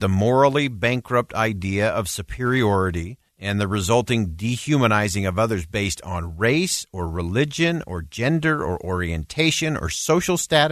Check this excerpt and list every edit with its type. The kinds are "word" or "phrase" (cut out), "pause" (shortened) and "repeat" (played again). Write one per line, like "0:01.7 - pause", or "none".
0:03.3 - pause